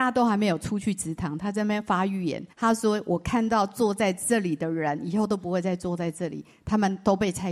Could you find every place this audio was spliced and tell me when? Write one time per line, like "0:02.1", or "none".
0:02.5